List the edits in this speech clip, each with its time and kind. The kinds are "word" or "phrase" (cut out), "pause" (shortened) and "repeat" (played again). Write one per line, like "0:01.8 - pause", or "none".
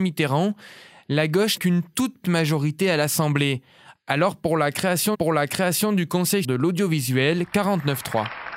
0:01.6 - word
0:02.2 - word
0:05.1 - repeat
0:06.4 - word